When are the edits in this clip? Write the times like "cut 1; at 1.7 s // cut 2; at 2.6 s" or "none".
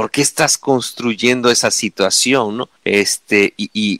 cut 1; at 2.8 s